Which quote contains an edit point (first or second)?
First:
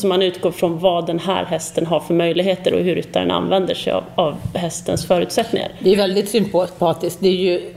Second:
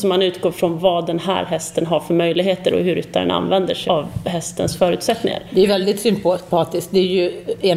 second